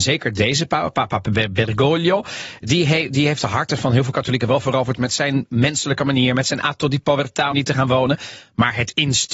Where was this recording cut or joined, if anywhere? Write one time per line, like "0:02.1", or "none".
0:07.5